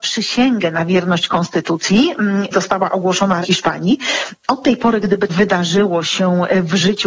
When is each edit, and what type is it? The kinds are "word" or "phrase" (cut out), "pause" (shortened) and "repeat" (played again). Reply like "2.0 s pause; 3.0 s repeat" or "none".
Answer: 2.5 s word; 3.4 s word; 5.3 s word

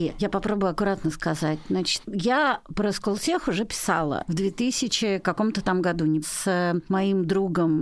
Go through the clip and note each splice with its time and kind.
6.2 s word

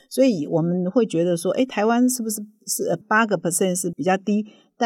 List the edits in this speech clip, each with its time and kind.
none

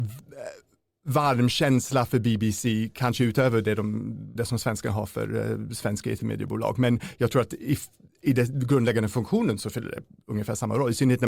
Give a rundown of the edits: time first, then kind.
4.4 s word

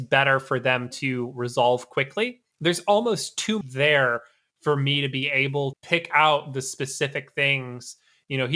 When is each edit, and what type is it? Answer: 2.5 s pause; 3.6 s word; 5.7 s word

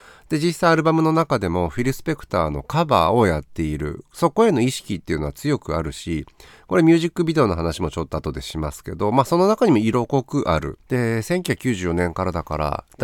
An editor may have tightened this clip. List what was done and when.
10.8 s pause

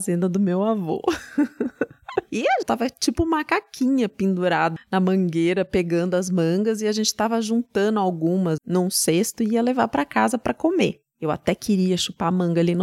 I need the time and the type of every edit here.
2.6 s phrase; 4.8 s word; 8.6 s word

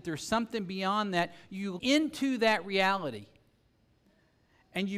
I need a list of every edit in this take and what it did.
1.8 s word

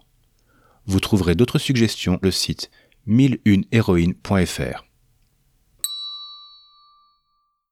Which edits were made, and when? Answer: 2.2 s word

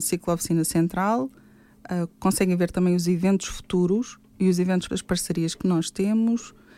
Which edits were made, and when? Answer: 4.9 s word

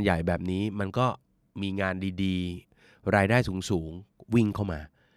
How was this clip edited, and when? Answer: 2.6 s pause

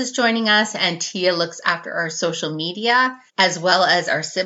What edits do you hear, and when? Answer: 3.3 s pause

